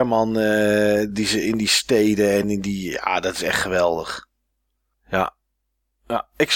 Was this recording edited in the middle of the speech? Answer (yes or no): no